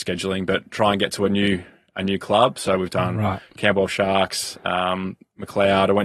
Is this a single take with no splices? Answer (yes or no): yes